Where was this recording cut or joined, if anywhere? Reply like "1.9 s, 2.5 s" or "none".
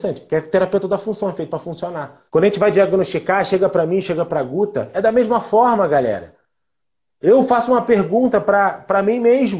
2.3 s, 6.8 s